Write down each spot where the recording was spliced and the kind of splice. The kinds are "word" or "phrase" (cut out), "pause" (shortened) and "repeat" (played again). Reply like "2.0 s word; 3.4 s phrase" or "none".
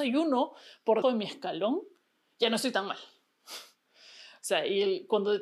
1.0 s word